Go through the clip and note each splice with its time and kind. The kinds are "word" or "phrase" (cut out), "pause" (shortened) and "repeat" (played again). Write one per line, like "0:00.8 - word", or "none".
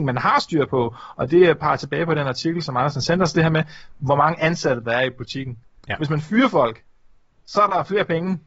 none

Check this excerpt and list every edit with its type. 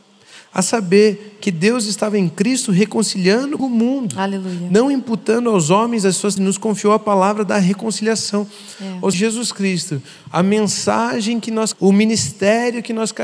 0:03.6 - word
0:06.4 - word
0:09.1 - phrase
0:11.7 - word

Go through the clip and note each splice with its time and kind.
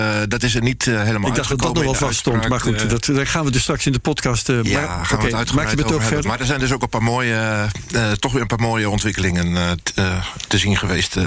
none

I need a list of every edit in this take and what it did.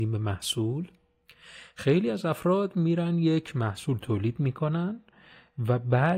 none

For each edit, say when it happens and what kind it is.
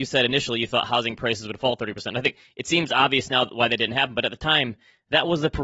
none

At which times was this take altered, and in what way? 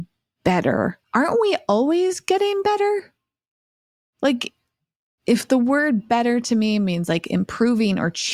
0:01.0 - pause

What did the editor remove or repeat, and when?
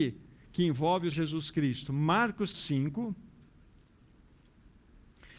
0:01.1 - word
0:02.5 - word

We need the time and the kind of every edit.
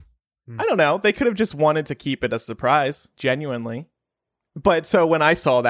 0:03.1 - pause

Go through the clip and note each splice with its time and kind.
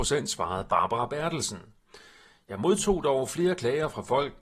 none

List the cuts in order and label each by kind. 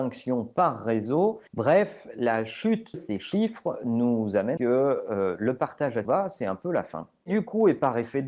0:01.5 - pause
0:02.9 - word
0:04.6 - phrase
0:06.0 - word

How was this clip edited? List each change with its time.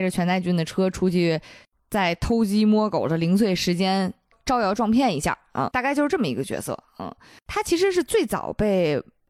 0:05.7 - word

